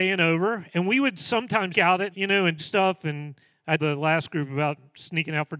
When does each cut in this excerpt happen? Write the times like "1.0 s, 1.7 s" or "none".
1.7 s, 2.1 s, 2.6 s, 3.8 s